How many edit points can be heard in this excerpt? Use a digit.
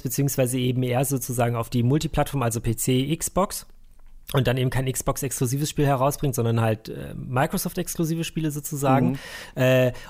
1